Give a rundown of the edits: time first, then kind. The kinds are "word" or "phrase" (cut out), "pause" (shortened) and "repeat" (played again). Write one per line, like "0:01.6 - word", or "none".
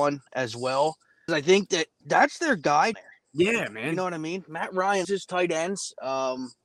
0:01.3 - word
0:02.0 - word
0:02.9 - word
0:05.0 - word